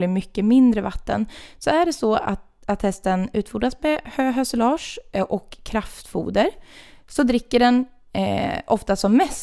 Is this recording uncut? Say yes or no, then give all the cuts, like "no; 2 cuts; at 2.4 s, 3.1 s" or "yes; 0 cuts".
yes; 0 cuts